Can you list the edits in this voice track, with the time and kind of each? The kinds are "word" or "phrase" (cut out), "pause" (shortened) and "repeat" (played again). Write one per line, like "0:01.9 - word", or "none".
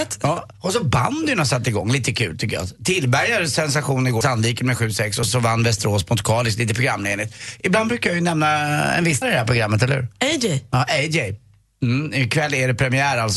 0:04.2 - word
0:05.3 - word
0:09.2 - word